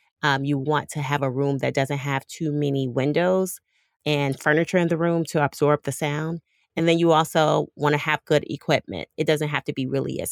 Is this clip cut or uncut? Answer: uncut